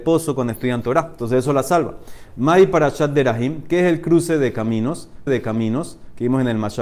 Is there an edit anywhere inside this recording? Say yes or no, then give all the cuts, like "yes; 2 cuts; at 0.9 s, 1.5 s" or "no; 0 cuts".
yes; 1 cut; at 5.3 s